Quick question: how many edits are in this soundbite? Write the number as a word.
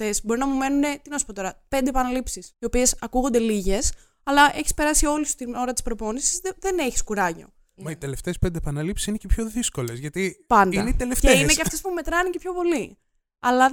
one